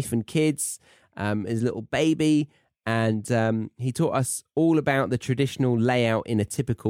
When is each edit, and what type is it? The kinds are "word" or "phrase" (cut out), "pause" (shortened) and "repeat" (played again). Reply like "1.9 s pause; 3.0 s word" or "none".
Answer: none